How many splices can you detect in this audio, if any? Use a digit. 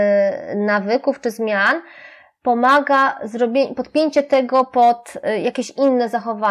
0